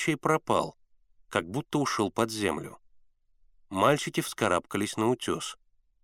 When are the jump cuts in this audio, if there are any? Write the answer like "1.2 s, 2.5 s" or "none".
none